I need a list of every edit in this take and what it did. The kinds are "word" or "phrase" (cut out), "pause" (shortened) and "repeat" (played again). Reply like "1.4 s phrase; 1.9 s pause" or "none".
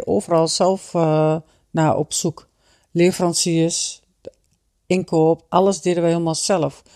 none